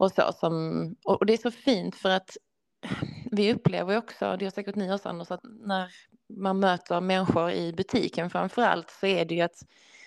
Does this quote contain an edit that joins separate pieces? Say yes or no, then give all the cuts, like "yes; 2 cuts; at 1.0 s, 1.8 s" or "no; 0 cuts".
yes; 1 cut; at 5.4 s